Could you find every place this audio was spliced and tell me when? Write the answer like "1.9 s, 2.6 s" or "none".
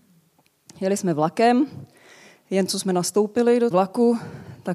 3.7 s

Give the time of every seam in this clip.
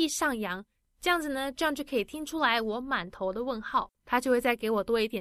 3.9 s

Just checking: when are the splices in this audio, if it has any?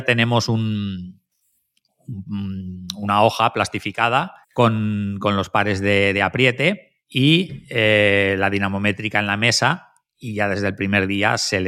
4.4 s, 7.0 s

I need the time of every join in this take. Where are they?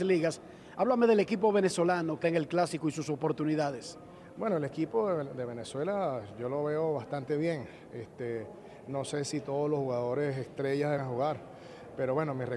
2.2 s, 11.0 s

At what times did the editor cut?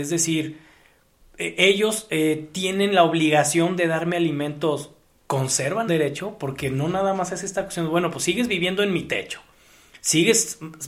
5.9 s

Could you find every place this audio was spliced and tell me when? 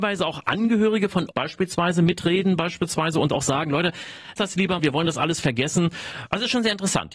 1.3 s, 4.4 s, 4.8 s

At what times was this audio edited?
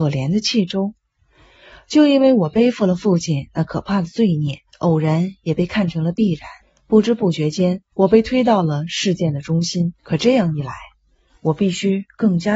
4.7 s, 6.6 s, 7.9 s, 10.0 s

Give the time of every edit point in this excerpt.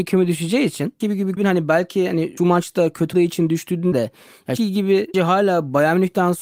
1.0 s, 1.4 s, 2.4 s, 3.1 s, 3.9 s, 4.6 s, 5.1 s

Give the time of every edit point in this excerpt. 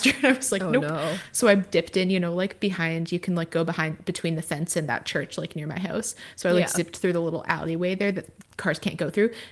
none

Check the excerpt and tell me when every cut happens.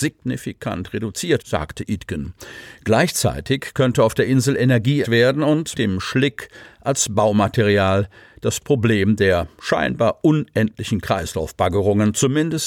1.4 s, 5.0 s, 5.7 s

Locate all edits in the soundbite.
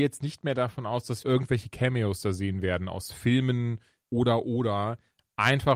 1.2 s, 4.0 s

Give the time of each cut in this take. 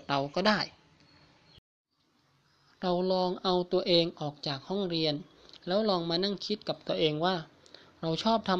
none

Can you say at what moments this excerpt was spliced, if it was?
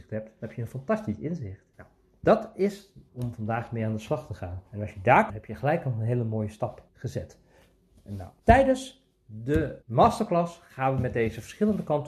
1.7 s, 3.1 s, 4.7 s, 5.3 s, 6.9 s, 8.4 s, 9.8 s

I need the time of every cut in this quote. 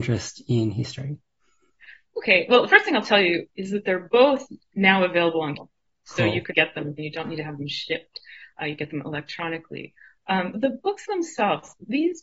5.6 s, 6.5 s, 7.0 s, 10.5 s

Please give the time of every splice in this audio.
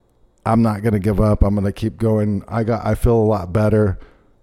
none

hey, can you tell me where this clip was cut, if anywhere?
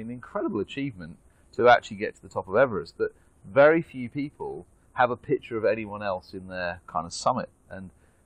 none

